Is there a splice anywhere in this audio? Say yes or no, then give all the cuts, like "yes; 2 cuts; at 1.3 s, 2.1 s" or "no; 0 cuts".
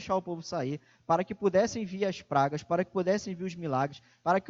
no; 0 cuts